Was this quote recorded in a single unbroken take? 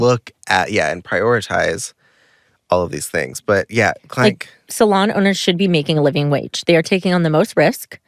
yes; 0 cuts

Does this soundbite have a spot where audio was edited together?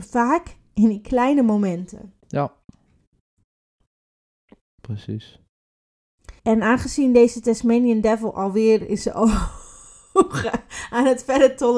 yes; 1 cut; at 6.4 s

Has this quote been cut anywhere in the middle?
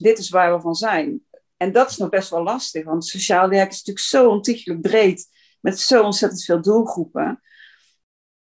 no; 0 cuts

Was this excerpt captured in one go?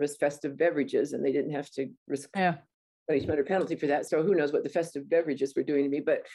no; 1 cut; at 2.0 s

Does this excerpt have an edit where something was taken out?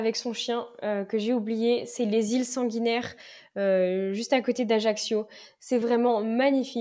no; 0 cuts

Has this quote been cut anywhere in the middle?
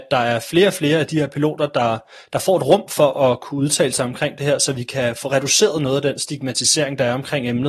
no; 0 cuts

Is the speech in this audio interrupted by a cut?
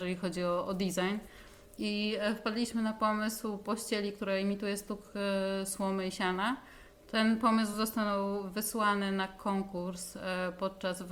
no; 0 cuts

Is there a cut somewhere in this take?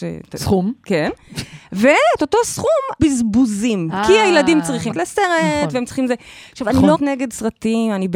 yes; 3 cuts; at 3.0 s, 4.9 s, 6.9 s

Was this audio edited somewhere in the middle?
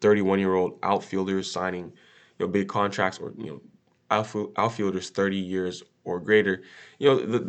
no; 0 cuts

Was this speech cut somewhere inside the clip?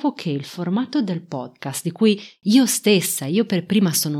no; 0 cuts

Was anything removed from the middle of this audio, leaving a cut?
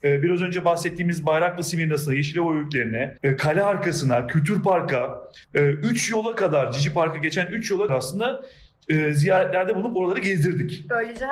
yes; 3 cuts; at 3.2 s, 5.4 s, 7.9 s

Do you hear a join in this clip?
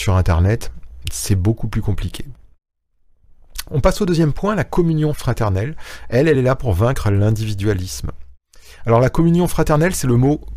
no; 0 cuts

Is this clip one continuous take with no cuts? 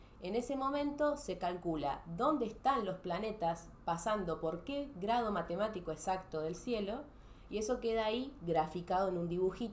yes; 0 cuts

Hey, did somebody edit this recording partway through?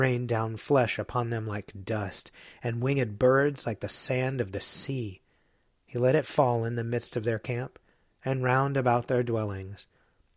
no; 0 cuts

